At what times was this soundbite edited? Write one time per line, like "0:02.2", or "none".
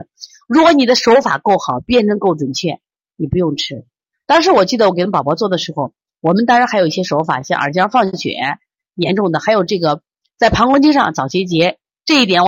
none